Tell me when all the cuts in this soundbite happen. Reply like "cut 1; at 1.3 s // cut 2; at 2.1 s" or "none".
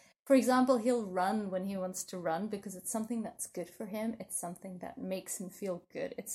none